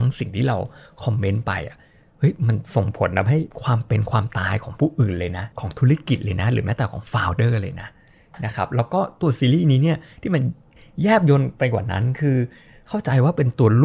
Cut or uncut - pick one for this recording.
cut